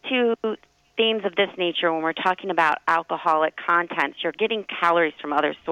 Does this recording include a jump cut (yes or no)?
no